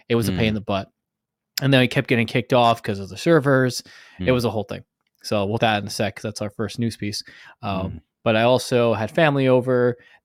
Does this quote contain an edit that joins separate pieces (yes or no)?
yes